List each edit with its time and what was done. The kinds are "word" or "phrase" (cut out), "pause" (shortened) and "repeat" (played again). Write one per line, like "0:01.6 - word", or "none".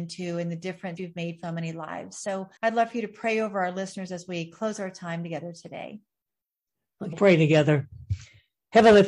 0:01.0 - word
0:01.4 - word
0:02.6 - pause
0:07.1 - phrase